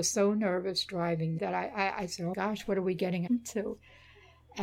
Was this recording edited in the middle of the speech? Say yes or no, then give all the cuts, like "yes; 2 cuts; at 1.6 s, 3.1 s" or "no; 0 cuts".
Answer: yes; 3 cuts; at 1.4 s, 2.3 s, 3.3 s